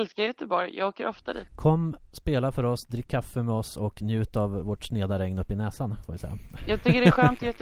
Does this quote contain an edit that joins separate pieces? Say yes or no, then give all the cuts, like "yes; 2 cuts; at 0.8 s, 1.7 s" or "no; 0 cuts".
no; 0 cuts